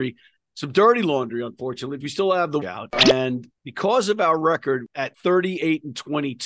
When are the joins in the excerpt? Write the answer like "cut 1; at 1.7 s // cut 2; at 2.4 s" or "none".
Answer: cut 1; at 2.0 s // cut 2; at 2.6 s